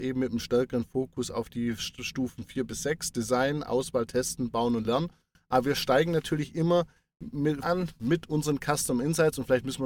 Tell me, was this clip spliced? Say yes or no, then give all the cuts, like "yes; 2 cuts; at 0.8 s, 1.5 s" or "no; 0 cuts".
yes; 1 cut; at 7.6 s